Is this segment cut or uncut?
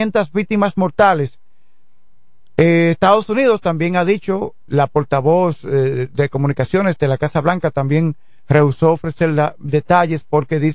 cut